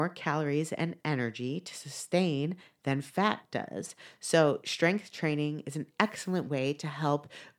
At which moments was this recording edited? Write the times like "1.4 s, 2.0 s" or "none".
none